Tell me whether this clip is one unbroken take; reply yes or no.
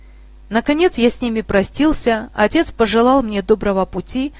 yes